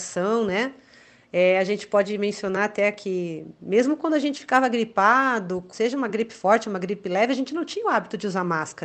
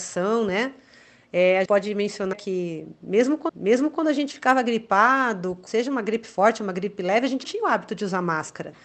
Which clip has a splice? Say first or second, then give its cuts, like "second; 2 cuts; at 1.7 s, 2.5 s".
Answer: second; 4 cuts; at 1.6 s, 2.3 s, 3.5 s, 7.4 s